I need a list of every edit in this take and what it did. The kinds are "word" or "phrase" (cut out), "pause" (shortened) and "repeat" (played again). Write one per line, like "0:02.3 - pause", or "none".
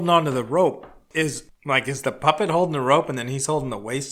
none

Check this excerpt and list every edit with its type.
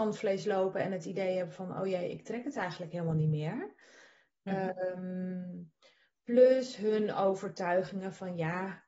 none

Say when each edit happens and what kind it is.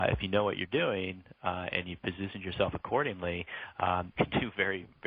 0:04.2 - word

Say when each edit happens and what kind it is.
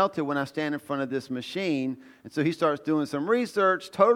none

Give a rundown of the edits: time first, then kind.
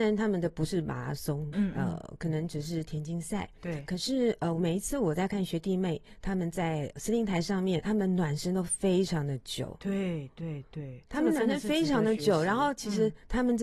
0:01.5 - word
0:07.8 - word
0:11.1 - pause

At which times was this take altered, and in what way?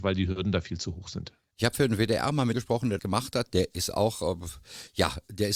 0:02.5 - word
0:03.0 - word

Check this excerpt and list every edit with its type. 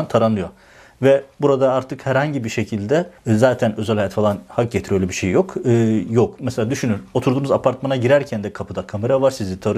0:03.2 - pause

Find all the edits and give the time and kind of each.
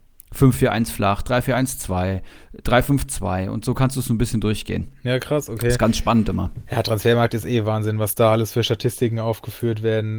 none

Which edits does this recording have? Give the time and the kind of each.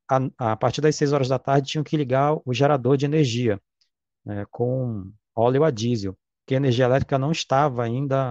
0:06.5 - word

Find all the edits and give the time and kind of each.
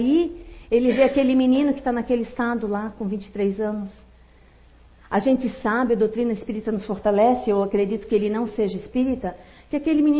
none

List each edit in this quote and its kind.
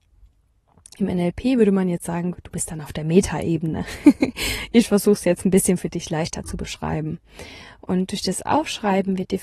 none

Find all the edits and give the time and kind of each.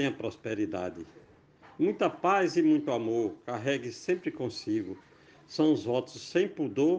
none

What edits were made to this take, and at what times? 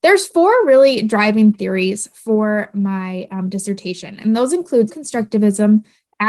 0:04.9 - word

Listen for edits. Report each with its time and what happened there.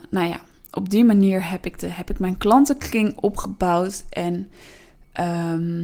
none

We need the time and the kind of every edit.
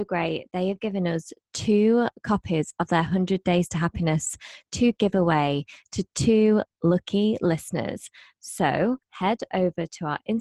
0:09.0 - pause

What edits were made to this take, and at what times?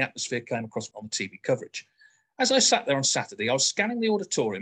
0:00.9 - word

